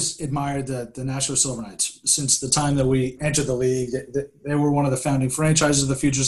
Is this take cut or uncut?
uncut